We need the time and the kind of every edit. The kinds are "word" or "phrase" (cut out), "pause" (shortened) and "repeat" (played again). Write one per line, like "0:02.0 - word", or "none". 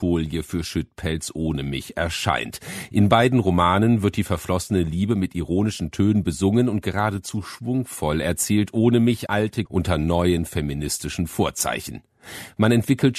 0:09.3 - word
0:09.7 - word